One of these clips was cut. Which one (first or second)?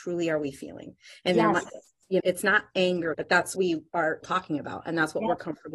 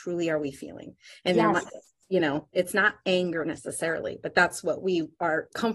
first